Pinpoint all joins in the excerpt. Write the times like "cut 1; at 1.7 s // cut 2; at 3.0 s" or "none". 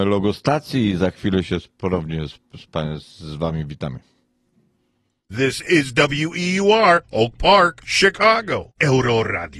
none